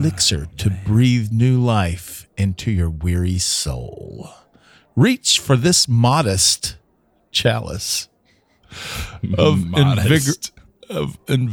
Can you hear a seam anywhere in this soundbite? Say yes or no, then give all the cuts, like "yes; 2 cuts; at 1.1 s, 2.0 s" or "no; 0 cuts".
no; 0 cuts